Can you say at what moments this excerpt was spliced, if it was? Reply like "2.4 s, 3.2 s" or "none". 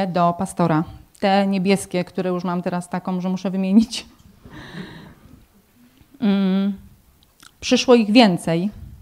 none